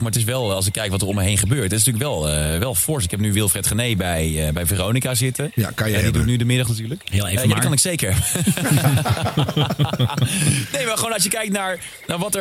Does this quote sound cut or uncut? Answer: uncut